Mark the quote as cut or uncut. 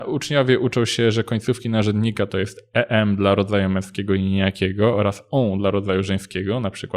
uncut